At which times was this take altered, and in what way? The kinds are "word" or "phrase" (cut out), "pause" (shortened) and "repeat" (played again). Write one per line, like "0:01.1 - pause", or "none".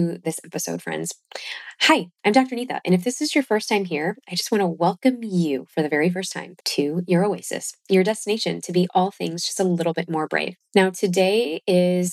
0:06.6 - pause
0:10.6 - pause